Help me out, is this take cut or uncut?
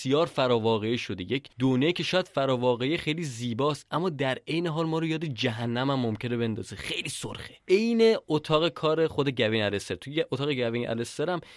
cut